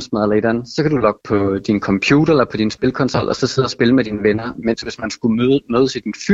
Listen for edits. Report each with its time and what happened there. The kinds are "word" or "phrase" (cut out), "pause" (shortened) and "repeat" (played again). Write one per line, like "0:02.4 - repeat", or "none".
0:01.2 - word